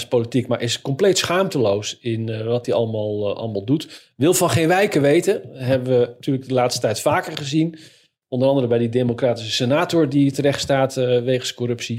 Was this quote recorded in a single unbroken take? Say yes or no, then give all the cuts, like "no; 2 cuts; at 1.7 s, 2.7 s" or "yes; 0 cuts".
yes; 0 cuts